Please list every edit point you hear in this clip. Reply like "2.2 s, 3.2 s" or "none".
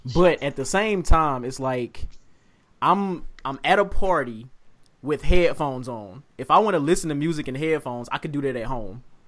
none

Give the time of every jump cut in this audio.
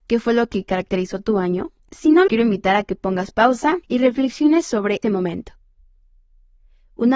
1.8 s, 2.3 s, 3.8 s, 5.0 s

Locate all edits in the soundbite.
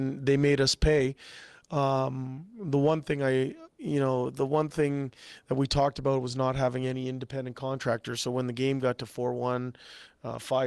3.7 s

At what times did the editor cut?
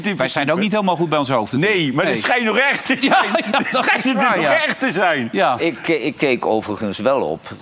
none

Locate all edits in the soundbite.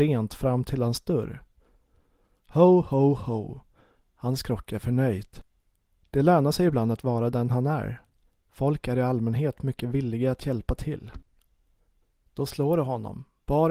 none

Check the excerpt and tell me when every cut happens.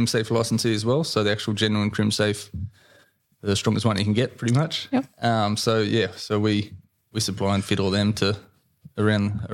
none

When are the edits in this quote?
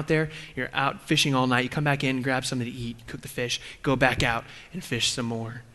none

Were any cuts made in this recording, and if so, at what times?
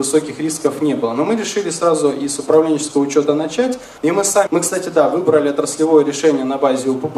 4.0 s, 4.5 s

